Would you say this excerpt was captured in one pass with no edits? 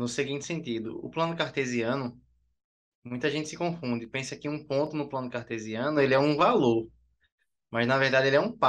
yes; 0 cuts

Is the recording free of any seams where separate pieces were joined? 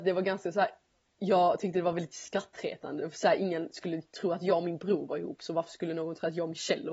yes; 0 cuts

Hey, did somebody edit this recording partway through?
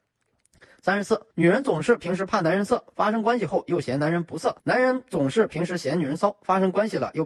yes; 2 cuts; at 1.3 s, 4.6 s

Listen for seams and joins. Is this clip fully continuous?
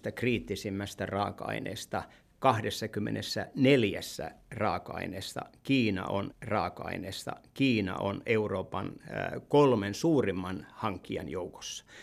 no; 1 cut; at 6.3 s

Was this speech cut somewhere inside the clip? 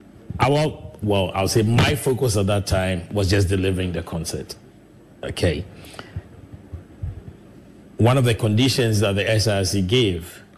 no; 0 cuts

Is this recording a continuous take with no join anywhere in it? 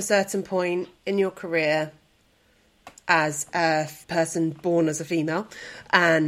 no; 2 cuts; at 1.0 s, 4.0 s

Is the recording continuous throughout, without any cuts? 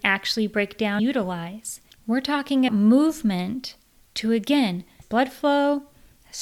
no; 3 cuts; at 1.0 s, 2.7 s, 5.0 s

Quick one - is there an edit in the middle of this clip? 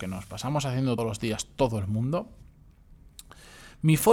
yes; 1 cut; at 1.0 s

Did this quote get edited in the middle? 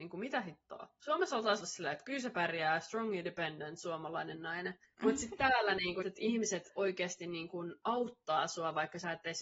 yes; 3 cuts; at 1.6 s, 4.8 s, 6.0 s

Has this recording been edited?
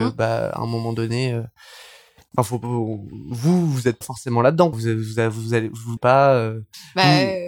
yes; 4 cuts; at 2.4 s, 4.0 s, 4.7 s, 6.0 s

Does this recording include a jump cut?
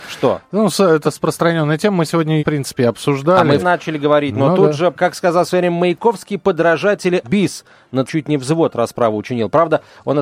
yes; 6 cuts; at 1.0 s, 2.4 s, 3.6 s, 5.0 s, 7.2 s, 8.1 s

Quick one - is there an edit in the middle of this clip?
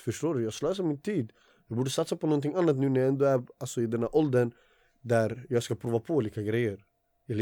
no; 0 cuts

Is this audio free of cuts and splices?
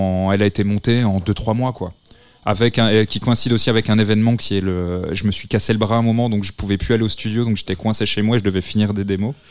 yes; 0 cuts

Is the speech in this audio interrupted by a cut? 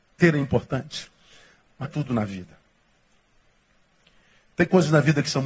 yes; 1 cut; at 1.8 s

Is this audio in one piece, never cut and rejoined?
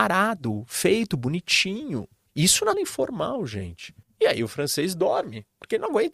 no; 3 cuts; at 2.3 s, 2.7 s, 4.0 s

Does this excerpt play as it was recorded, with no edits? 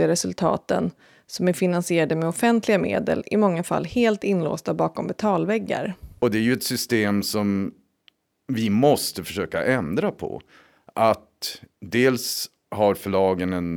yes; 0 cuts

